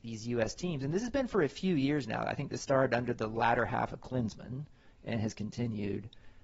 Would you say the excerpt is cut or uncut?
uncut